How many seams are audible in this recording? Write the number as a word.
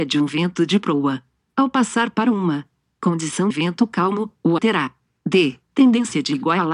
two